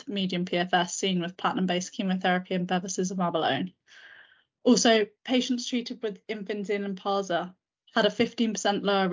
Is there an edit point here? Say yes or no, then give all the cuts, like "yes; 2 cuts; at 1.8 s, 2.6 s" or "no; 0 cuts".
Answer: no; 0 cuts